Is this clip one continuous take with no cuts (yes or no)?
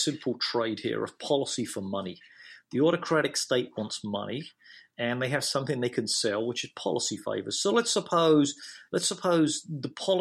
yes